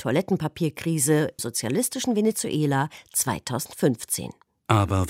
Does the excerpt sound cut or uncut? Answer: cut